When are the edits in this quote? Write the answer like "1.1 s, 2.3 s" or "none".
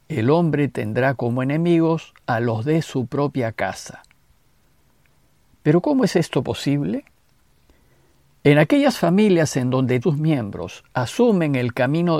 10.0 s